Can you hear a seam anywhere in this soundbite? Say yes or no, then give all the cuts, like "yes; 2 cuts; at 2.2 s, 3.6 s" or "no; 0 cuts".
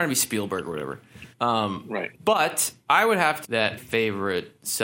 yes; 4 cuts; at 1.3 s, 2.1 s, 3.4 s, 3.8 s